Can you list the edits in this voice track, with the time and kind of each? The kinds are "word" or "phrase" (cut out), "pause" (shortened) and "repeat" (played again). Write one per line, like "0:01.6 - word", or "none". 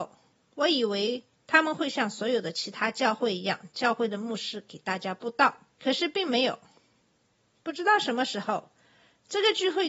0:01.3 - pause
0:05.7 - pause